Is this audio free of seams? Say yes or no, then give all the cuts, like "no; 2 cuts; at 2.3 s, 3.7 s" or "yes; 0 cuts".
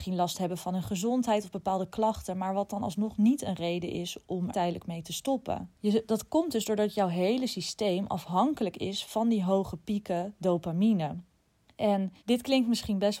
no; 3 cuts; at 4.5 s, 5.8 s, 12.2 s